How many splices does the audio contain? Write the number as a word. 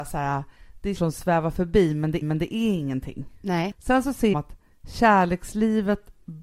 three